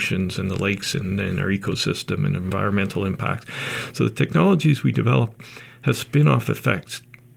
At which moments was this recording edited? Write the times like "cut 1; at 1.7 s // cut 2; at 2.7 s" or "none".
none